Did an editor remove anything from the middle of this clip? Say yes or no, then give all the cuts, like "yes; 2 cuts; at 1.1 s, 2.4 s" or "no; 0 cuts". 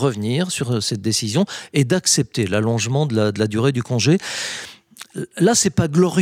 no; 0 cuts